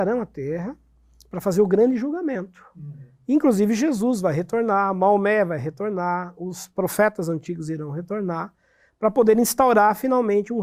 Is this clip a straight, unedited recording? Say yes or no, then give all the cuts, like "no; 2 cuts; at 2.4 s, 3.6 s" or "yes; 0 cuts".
yes; 0 cuts